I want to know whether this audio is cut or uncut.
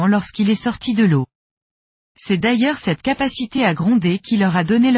uncut